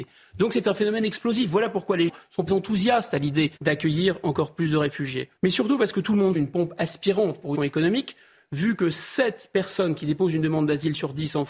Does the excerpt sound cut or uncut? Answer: cut